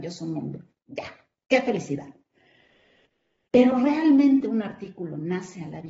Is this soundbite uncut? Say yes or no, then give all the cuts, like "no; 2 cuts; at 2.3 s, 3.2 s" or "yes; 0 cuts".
yes; 0 cuts